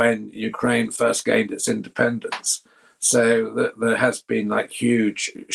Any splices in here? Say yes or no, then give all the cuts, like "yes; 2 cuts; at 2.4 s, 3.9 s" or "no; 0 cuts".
no; 0 cuts